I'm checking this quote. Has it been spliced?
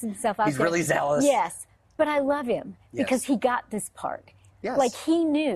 no; 0 cuts

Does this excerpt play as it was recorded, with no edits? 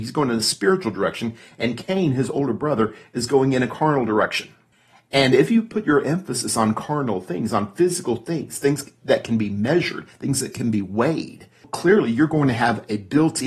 yes; 0 cuts

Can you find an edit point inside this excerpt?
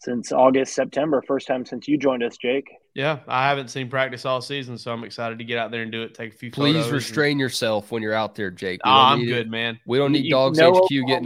no; 0 cuts

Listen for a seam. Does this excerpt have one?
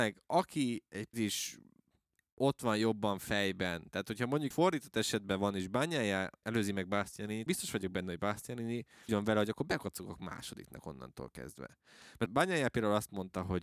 yes; 6 cuts; at 1.1 s, 4.5 s, 6.4 s, 7.5 s, 9.1 s, 12.3 s

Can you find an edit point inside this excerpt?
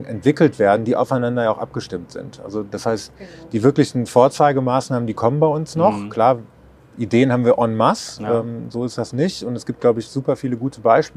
no; 0 cuts

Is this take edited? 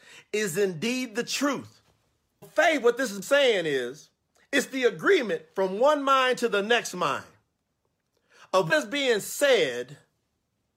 yes; 3 cuts; at 2.4 s, 3.2 s, 8.7 s

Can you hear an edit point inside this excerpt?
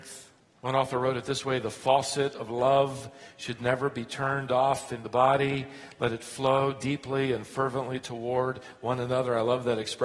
no; 0 cuts

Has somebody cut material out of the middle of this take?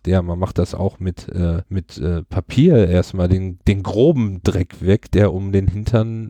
yes; 1 cut; at 1.7 s

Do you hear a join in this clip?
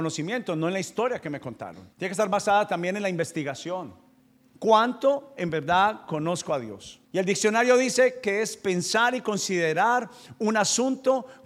yes; 3 cuts; at 1.9 s, 4.2 s, 7.0 s

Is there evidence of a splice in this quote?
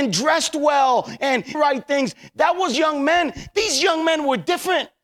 yes; 2 cuts; at 1.5 s, 2.7 s

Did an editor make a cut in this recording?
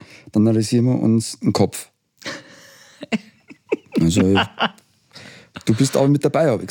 no; 0 cuts

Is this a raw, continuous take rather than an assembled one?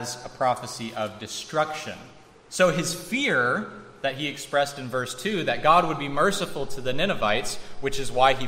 yes; 0 cuts

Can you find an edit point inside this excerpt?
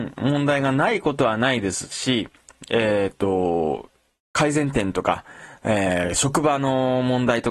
no; 0 cuts

